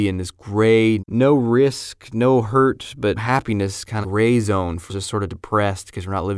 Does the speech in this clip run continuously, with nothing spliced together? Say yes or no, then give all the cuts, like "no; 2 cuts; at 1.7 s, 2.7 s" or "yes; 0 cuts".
no; 4 cuts; at 1.0 s, 3.2 s, 4.0 s, 4.9 s